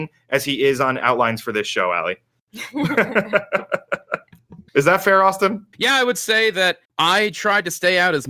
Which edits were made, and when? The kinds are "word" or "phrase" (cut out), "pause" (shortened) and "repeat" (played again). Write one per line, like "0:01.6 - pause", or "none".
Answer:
0:04.7 - pause
0:05.7 - pause
0:06.8 - pause